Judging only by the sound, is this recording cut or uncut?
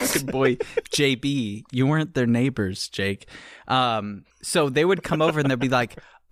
cut